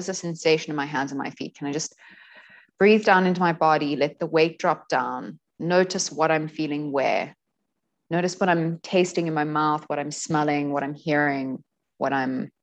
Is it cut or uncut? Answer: uncut